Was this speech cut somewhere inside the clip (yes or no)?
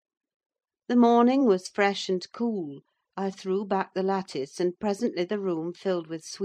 no